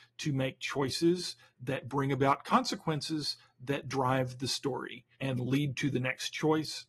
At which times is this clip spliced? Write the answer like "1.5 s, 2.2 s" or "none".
5.1 s